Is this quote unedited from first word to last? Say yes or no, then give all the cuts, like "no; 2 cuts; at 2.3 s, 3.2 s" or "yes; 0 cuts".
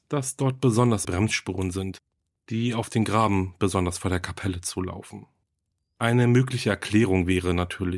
no; 1 cut; at 1.0 s